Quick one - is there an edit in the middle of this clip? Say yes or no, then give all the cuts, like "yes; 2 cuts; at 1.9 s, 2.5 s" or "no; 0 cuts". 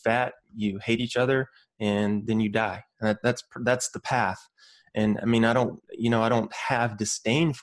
no; 0 cuts